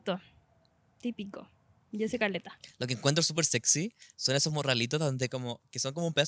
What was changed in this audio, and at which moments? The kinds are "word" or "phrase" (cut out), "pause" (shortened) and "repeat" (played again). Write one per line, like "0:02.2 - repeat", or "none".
none